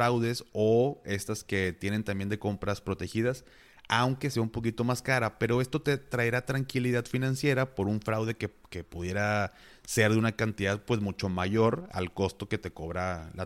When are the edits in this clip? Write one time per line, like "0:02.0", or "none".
none